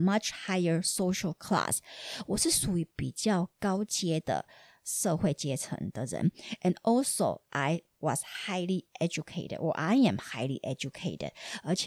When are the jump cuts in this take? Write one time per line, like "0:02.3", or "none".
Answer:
none